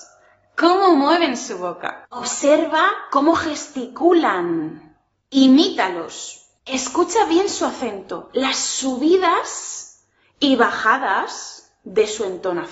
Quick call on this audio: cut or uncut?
uncut